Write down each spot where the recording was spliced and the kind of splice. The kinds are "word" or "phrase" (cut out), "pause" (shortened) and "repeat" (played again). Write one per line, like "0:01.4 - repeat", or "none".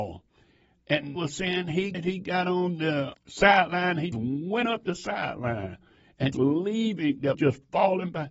0:01.2 - word
0:01.9 - word
0:03.1 - word
0:04.1 - word
0:06.3 - word
0:07.3 - word

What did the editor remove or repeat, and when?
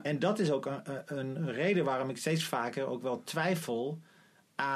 none

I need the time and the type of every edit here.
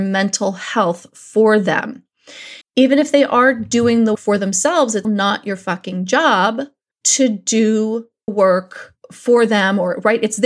0:02.6 - pause
0:04.1 - word
0:05.0 - word
0:06.9 - pause
0:08.3 - word

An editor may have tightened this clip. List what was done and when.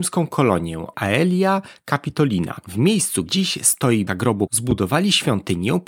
0:00.9 - word
0:03.3 - word
0:04.1 - word
0:04.5 - word

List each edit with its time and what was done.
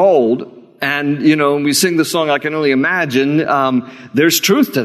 none

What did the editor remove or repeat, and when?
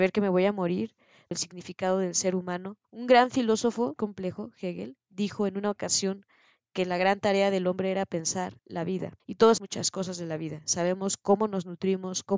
0:01.3 - phrase
0:02.8 - pause
0:04.0 - word
0:08.6 - pause
0:09.2 - pause
0:09.6 - word

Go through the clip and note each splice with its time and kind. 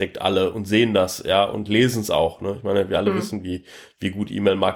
none

